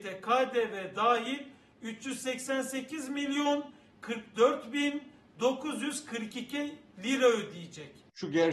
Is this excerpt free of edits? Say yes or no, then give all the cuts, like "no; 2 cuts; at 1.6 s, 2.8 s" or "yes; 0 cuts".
yes; 0 cuts